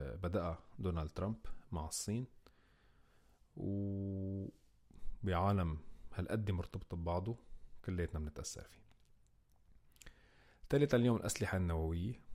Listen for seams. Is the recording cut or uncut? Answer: uncut